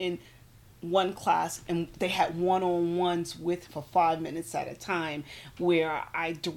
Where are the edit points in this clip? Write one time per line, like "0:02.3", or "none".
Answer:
0:03.7